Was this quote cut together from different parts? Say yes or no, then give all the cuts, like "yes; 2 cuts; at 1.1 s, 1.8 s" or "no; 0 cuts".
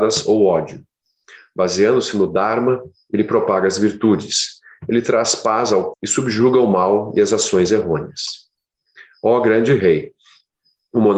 yes; 1 cut; at 5.9 s